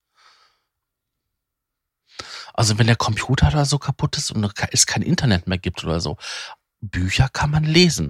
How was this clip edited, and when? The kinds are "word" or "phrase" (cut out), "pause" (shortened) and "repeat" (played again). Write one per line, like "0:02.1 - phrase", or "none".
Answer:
none